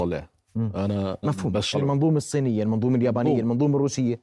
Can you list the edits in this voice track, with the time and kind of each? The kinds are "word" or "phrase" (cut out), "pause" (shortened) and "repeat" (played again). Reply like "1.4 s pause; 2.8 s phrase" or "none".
1.2 s word; 1.7 s phrase